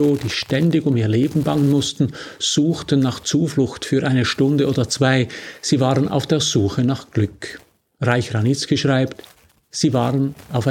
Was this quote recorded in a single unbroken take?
yes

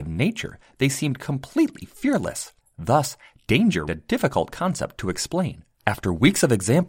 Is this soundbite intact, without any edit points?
no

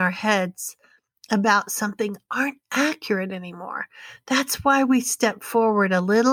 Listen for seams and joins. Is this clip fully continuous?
yes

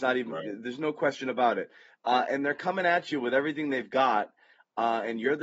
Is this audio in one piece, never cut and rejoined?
yes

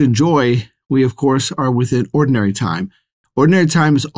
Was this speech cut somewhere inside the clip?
no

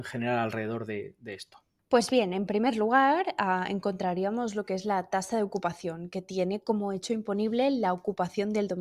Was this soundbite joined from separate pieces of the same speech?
no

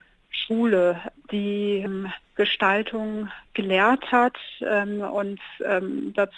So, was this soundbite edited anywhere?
yes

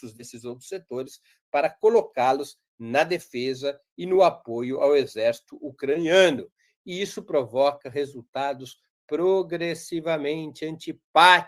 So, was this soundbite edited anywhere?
no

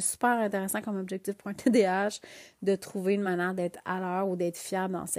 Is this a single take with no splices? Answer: yes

